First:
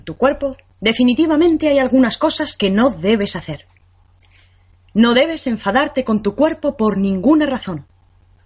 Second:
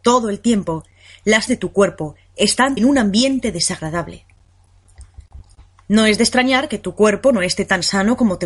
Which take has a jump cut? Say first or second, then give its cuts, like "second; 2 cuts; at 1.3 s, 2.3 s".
second; 2 cuts; at 1.5 s, 2.8 s